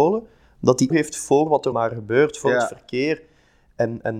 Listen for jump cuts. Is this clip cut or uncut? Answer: cut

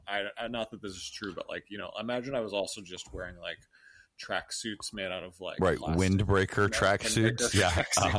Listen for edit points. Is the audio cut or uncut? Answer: uncut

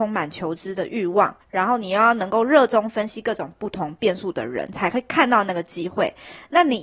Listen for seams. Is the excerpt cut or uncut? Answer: cut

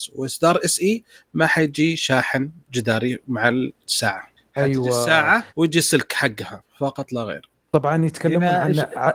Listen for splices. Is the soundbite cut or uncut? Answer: cut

